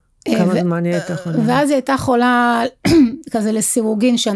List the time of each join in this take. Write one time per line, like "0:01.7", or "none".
none